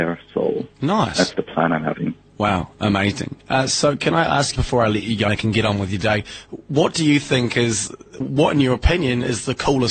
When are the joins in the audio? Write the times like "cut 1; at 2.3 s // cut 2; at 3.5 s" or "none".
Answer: cut 1; at 1.3 s // cut 2; at 4.6 s // cut 3; at 5.3 s // cut 4; at 8.2 s